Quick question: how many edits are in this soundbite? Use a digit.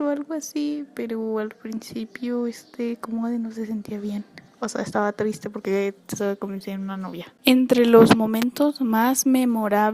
2